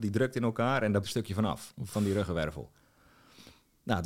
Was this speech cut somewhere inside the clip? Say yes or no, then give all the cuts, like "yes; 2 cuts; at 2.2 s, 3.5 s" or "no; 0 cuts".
yes; 1 cut; at 1.0 s